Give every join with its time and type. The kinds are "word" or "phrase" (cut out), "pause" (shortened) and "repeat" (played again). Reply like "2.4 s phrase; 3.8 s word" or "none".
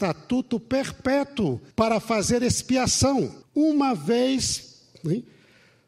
1.7 s pause; 3.4 s pause